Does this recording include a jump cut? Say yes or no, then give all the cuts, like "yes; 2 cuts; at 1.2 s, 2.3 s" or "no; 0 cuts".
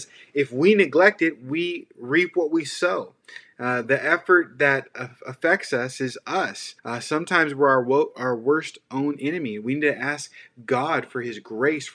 yes; 1 cut; at 6.8 s